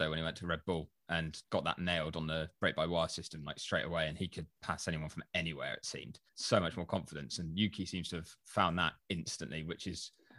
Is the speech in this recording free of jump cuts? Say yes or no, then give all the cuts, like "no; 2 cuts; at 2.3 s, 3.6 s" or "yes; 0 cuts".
no; 2 cuts; at 1.4 s, 6.3 s